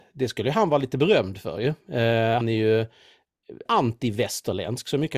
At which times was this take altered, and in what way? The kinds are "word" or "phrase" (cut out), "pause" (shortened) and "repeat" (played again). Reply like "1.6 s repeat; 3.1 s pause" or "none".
2.4 s word; 3.7 s phrase